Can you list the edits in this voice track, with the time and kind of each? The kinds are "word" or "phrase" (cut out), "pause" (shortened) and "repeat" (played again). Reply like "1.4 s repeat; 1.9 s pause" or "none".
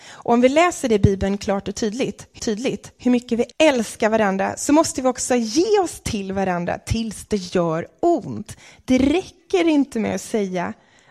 2.4 s repeat; 3.5 s word